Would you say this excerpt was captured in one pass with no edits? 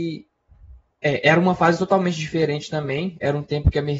yes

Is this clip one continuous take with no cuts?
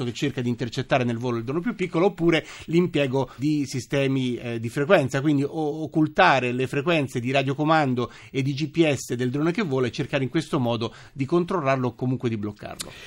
no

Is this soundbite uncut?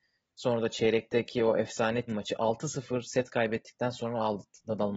no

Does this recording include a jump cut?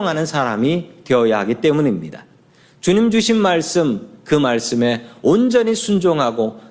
no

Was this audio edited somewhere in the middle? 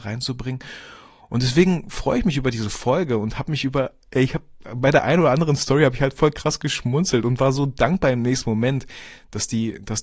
no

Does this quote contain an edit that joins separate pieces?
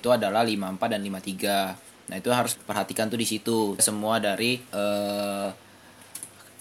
yes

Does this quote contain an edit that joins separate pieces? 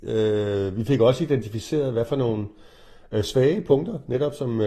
no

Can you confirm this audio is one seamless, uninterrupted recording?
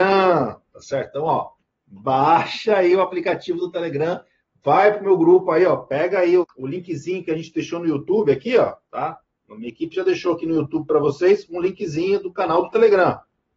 no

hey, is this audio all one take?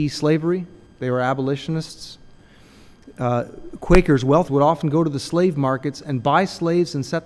no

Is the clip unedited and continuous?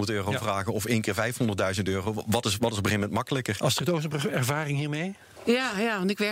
yes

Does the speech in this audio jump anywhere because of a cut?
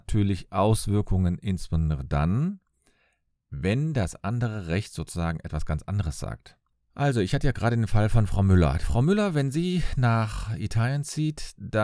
no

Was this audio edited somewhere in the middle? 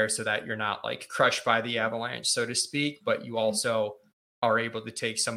no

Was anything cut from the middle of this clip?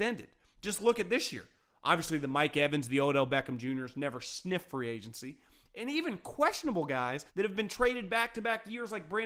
yes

